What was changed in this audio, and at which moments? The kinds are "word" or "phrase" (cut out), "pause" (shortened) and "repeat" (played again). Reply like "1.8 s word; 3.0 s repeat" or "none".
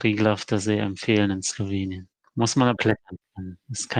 2.8 s word

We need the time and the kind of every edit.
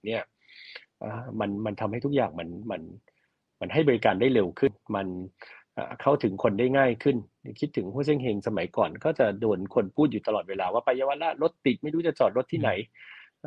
none

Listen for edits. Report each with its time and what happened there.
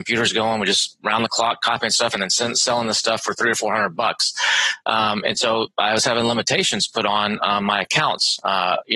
none

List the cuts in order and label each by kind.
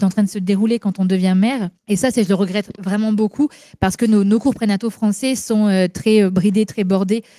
none

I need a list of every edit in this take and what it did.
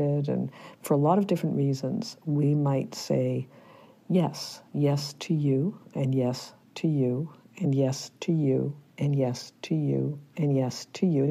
none

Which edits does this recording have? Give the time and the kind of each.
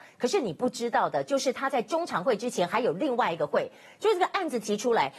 none

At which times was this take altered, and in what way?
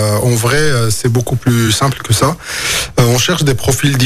none

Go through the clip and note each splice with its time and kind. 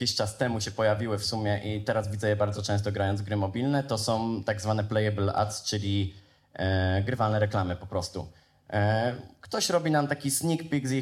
none

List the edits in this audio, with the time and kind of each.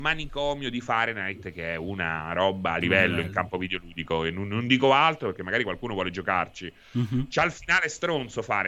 2.8 s phrase

